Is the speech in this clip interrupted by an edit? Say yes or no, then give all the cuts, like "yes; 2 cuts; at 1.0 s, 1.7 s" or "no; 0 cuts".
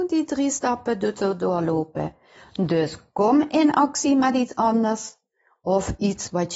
no; 0 cuts